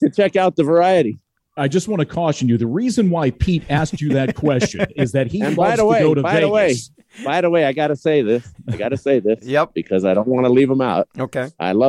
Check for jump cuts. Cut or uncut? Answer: uncut